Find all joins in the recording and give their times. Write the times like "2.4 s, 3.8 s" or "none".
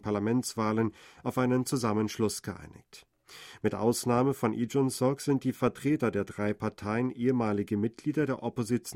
none